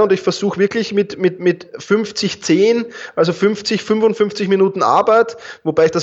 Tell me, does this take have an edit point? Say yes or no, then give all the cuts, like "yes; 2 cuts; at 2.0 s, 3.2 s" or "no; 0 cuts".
no; 0 cuts